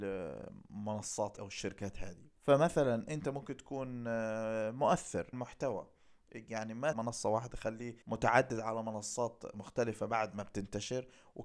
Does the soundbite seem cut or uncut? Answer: cut